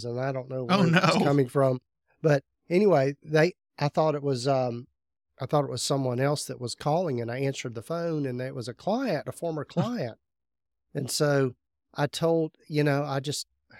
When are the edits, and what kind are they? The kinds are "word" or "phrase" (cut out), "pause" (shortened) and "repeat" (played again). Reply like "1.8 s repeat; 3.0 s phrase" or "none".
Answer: none

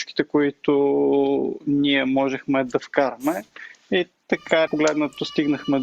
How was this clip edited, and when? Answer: 4.7 s word

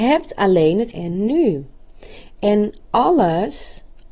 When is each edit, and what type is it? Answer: 0.9 s word

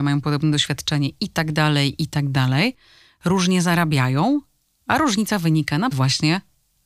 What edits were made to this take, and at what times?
5.9 s word

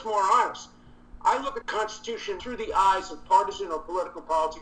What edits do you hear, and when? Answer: 1.6 s word; 2.4 s word

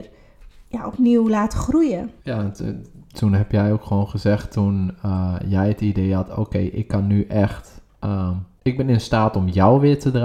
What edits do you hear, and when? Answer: 2.2 s pause; 8.5 s pause

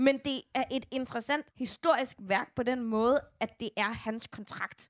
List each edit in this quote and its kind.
1.5 s pause

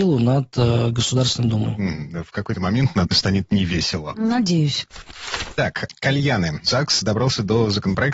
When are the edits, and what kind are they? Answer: 3.1 s word

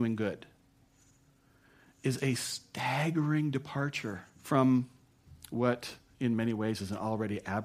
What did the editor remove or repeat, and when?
4.3 s pause

